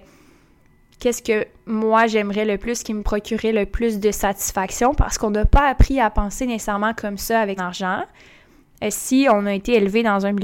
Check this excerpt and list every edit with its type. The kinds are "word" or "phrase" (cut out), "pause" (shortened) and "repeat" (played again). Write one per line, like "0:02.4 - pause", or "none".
0:07.6 - word